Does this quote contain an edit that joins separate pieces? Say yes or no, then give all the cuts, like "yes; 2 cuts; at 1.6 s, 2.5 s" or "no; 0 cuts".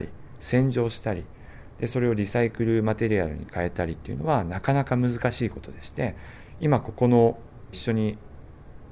yes; 1 cut; at 7.7 s